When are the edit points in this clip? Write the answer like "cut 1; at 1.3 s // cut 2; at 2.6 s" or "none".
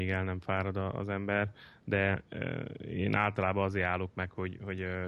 none